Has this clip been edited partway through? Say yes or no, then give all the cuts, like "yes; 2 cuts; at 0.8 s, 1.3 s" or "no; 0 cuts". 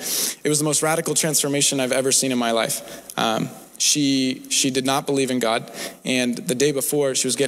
no; 0 cuts